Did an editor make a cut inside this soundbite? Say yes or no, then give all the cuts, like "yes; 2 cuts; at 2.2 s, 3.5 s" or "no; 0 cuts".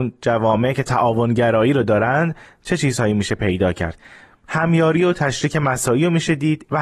no; 0 cuts